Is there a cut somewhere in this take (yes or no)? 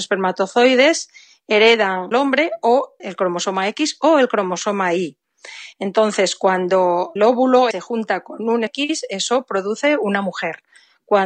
yes